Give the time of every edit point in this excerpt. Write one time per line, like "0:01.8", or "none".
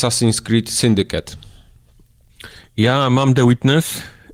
none